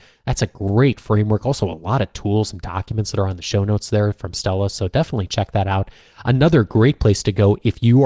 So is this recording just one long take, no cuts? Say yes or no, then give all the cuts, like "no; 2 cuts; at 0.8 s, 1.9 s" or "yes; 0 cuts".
yes; 0 cuts